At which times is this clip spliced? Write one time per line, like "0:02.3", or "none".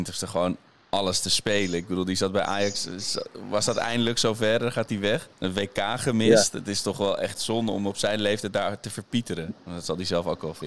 0:05.3